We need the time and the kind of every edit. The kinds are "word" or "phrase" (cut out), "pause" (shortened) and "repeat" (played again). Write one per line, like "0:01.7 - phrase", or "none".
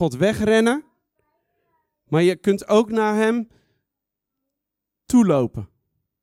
none